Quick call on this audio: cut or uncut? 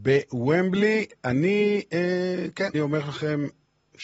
cut